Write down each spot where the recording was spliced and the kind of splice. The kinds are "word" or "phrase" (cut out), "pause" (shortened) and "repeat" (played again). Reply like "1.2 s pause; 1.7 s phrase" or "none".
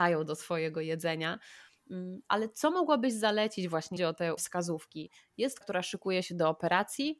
4.0 s phrase; 4.4 s word; 5.6 s word